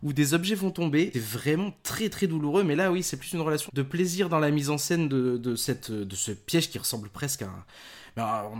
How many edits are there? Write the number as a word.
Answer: two